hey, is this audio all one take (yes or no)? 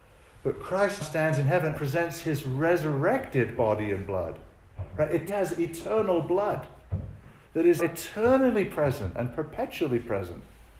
no